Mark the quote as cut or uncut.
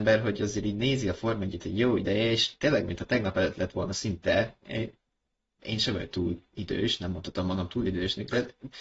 uncut